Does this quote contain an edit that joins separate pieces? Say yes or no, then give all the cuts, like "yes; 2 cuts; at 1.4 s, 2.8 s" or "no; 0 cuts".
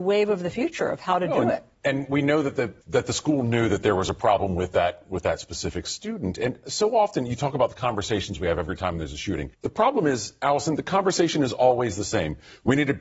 yes; 2 cuts; at 2.8 s, 9.5 s